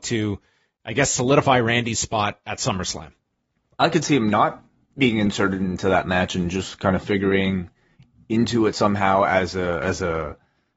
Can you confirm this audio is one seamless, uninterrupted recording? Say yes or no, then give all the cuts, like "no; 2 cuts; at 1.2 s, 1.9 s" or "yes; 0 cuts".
yes; 0 cuts